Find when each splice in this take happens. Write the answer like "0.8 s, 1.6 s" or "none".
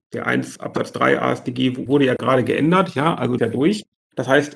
3.4 s